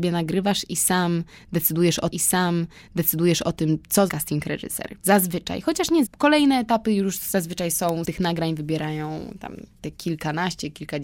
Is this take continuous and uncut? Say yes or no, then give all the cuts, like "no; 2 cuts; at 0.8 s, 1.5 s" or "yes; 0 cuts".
no; 6 cuts; at 2.1 s, 4.1 s, 5.0 s, 6.1 s, 8.0 s, 9.7 s